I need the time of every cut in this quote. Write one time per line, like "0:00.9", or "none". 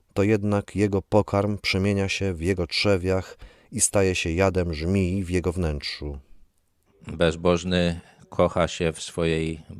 none